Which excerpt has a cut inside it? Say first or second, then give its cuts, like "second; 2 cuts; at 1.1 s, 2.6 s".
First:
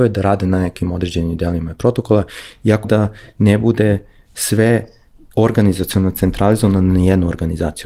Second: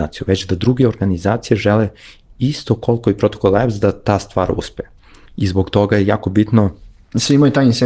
first; 1 cut; at 2.8 s